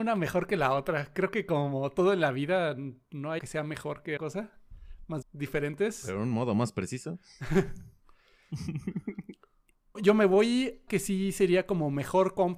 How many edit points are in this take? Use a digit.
5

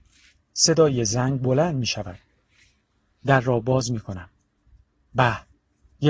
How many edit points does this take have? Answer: 0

